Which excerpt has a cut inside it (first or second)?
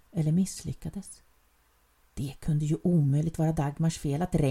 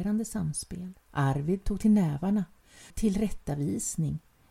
second